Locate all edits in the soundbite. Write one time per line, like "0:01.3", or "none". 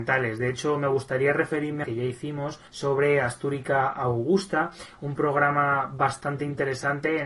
0:01.8
0:02.7